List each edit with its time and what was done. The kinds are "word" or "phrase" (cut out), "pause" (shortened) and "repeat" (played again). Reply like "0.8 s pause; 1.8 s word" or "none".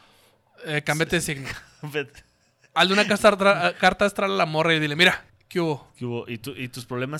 5.3 s pause